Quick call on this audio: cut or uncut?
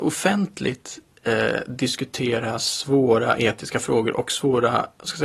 uncut